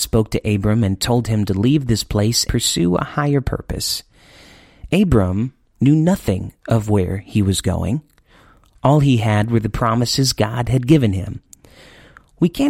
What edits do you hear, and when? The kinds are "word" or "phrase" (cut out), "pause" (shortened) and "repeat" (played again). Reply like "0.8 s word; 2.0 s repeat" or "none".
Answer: 2.5 s word